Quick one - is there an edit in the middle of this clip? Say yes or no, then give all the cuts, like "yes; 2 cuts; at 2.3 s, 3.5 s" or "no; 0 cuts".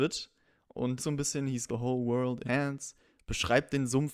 yes; 3 cuts; at 1.0 s, 1.7 s, 2.4 s